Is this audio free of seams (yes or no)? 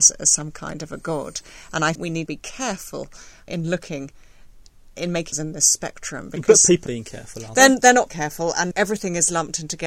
no